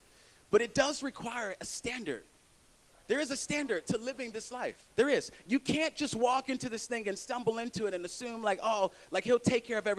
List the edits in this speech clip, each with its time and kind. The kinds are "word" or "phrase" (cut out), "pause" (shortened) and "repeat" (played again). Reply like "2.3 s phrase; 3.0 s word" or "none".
4.9 s pause